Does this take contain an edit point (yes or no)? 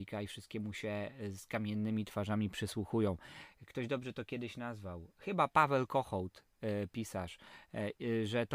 no